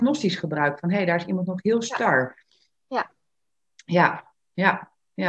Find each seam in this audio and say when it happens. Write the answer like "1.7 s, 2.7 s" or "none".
none